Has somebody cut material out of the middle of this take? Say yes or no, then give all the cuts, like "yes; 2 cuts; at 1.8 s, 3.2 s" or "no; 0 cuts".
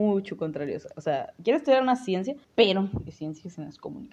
yes; 1 cut; at 2.4 s